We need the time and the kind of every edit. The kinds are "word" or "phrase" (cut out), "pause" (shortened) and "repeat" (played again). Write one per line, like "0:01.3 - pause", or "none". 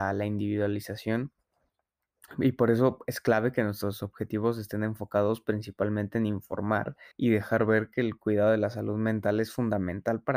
0:07.1 - pause